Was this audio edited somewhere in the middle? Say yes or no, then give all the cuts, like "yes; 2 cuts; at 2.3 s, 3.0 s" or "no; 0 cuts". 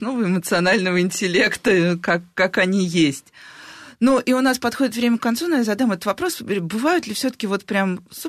no; 0 cuts